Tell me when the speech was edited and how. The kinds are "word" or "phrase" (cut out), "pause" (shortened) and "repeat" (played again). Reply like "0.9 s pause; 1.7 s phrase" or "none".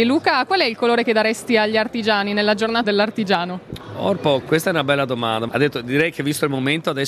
2.8 s word; 4.4 s word; 5.5 s phrase